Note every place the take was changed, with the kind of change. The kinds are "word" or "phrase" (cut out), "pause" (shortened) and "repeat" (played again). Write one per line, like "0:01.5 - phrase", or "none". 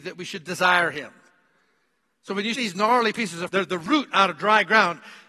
0:02.6 - word
0:03.5 - word